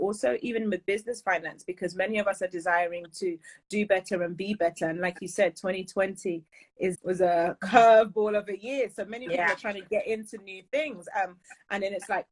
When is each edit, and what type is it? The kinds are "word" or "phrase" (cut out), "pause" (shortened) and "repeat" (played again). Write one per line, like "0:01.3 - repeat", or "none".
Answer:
0:06.9 - word